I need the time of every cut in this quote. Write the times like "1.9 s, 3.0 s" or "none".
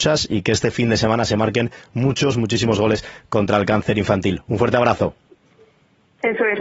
none